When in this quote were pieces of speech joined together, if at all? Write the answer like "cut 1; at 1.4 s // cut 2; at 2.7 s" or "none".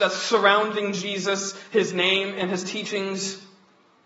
none